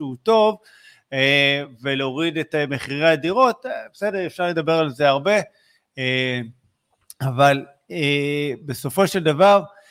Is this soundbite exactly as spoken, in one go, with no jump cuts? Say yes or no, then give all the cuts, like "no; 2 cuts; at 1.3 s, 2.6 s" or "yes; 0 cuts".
yes; 0 cuts